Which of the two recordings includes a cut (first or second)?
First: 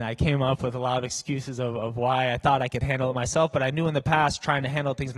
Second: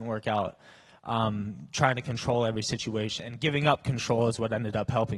second